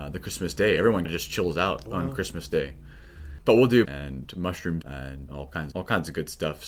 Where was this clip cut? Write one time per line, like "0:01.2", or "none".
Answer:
0:01.0
0:01.9
0:03.8
0:04.8
0:05.3
0:05.7